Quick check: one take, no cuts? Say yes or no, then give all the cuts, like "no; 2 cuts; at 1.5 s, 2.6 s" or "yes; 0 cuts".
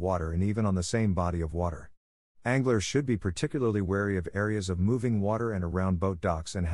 yes; 0 cuts